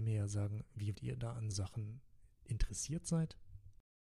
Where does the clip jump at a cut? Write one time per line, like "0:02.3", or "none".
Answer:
0:00.9
0:01.5